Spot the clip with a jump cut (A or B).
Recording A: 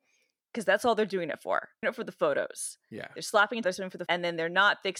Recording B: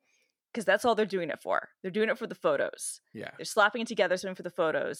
A